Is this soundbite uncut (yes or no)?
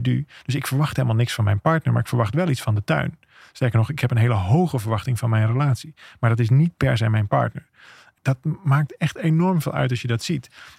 no